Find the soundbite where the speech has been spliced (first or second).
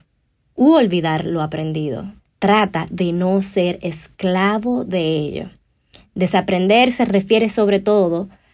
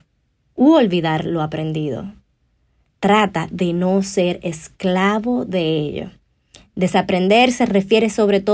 first